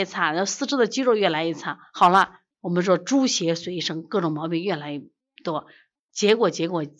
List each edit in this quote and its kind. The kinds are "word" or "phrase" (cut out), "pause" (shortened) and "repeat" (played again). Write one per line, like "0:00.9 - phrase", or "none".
0:02.5 - pause